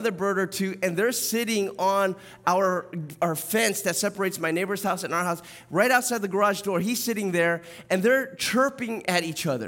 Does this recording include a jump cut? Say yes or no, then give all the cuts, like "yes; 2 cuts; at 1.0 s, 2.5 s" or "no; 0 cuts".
no; 0 cuts